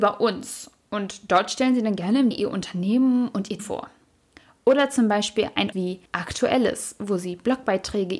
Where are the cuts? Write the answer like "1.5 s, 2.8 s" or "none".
2.3 s, 3.6 s, 5.7 s, 6.1 s